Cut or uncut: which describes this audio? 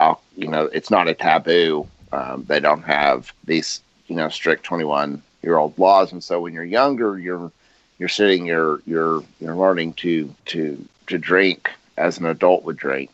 cut